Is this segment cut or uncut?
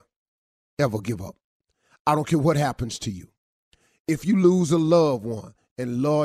uncut